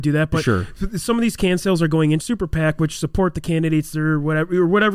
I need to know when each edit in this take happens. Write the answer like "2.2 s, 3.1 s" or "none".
2.2 s